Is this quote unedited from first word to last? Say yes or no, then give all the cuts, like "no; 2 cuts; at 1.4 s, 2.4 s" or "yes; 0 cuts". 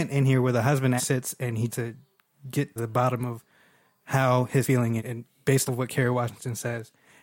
no; 6 cuts; at 1.0 s, 1.7 s, 2.8 s, 4.6 s, 5.0 s, 5.7 s